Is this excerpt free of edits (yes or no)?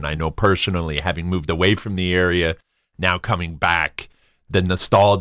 yes